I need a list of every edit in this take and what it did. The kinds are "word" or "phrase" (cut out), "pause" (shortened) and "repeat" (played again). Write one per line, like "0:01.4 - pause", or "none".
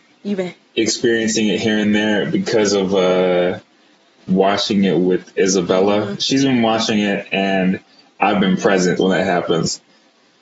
0:09.0 - word